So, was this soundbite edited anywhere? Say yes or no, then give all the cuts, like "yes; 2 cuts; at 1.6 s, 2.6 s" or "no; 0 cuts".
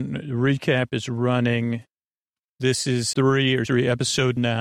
yes; 2 cuts; at 3.1 s, 3.7 s